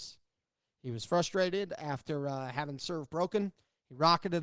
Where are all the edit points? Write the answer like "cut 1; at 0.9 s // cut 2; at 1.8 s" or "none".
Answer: none

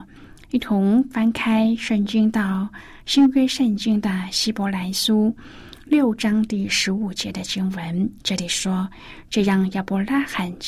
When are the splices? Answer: cut 1; at 8.2 s

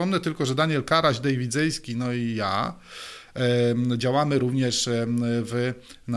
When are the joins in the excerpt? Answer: none

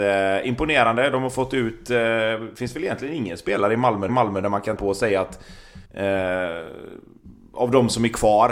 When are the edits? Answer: cut 1; at 4.1 s // cut 2; at 4.8 s // cut 3; at 5.9 s

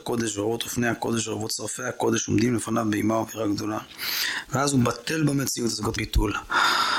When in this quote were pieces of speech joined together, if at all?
cut 1; at 6.0 s

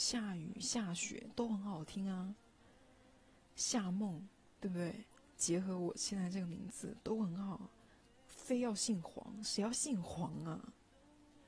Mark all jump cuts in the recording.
none

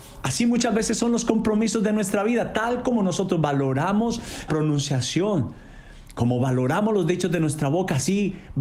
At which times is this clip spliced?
cut 1; at 4.5 s

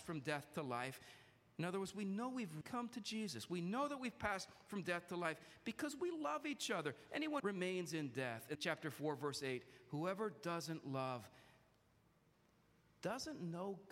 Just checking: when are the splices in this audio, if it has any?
cut 1; at 2.6 s // cut 2; at 7.4 s // cut 3; at 8.5 s

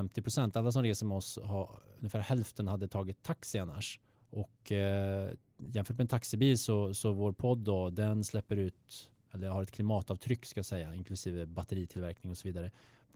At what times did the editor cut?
cut 1; at 4.1 s

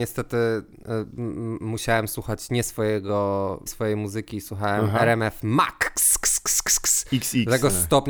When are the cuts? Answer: cut 1; at 3.7 s

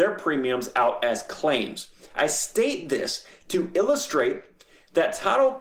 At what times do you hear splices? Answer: none

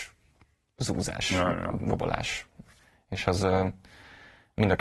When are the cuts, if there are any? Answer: none

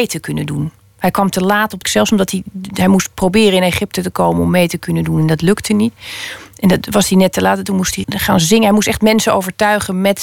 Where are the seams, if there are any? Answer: cut 1; at 1.8 s // cut 2; at 8.0 s

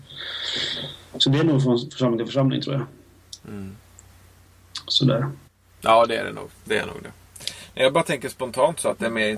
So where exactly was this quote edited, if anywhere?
cut 1; at 3.4 s // cut 2; at 5.5 s

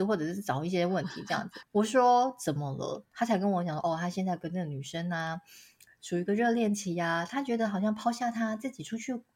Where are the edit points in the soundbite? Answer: none

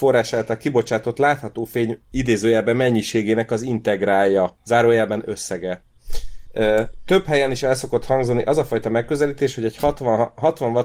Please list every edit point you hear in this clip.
none

